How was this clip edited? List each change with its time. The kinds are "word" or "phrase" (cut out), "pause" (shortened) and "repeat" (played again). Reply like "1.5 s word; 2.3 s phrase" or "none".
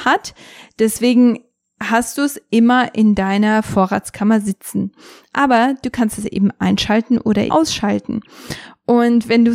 7.5 s word